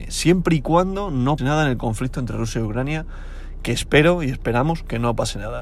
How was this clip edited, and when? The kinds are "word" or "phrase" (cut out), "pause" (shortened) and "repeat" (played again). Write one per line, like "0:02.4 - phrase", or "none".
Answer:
0:01.4 - word